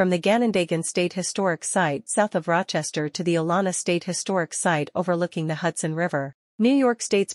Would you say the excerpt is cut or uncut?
cut